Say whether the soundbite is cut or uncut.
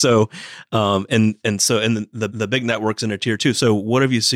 cut